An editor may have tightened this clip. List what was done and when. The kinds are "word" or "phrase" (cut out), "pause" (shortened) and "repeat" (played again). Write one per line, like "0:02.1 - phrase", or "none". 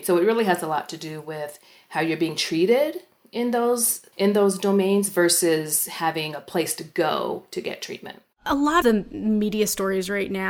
0:04.1 - word
0:08.3 - pause
0:08.8 - word